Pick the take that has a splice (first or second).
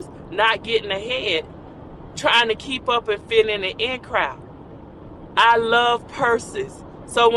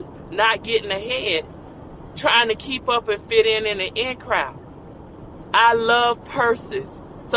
first